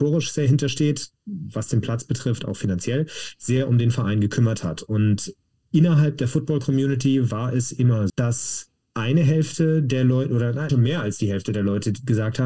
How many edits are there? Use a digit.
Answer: 2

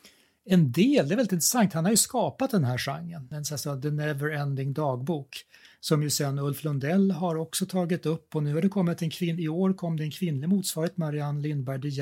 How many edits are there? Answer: 1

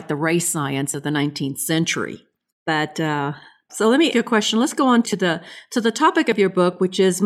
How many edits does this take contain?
4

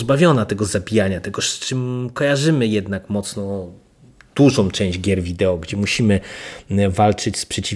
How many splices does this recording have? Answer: 0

